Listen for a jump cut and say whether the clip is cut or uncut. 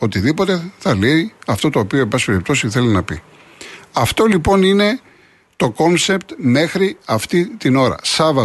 uncut